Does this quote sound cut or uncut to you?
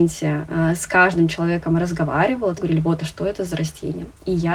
cut